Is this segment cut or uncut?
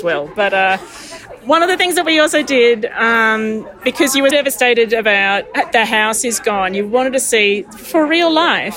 cut